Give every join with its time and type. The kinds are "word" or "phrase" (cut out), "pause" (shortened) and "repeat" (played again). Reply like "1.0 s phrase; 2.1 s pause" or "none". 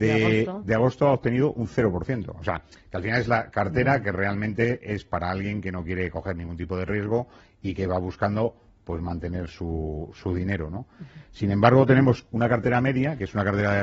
none